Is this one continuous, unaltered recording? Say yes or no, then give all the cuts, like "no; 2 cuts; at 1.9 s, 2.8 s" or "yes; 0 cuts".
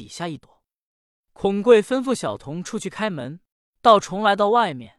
no; 1 cut; at 3.5 s